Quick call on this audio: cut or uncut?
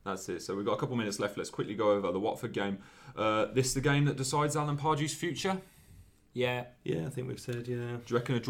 uncut